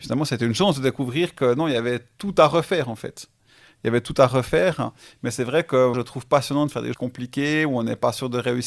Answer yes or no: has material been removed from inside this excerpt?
yes